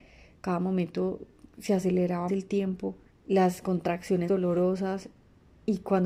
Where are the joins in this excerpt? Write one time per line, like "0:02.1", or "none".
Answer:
0:02.3
0:03.1
0:04.3